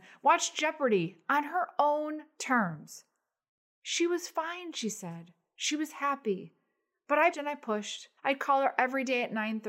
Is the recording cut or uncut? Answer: cut